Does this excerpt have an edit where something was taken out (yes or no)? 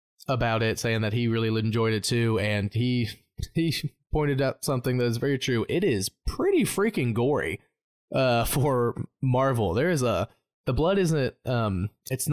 no